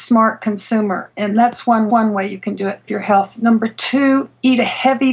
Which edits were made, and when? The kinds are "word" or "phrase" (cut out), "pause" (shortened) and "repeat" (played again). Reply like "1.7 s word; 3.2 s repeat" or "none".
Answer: 1.9 s repeat; 2.9 s word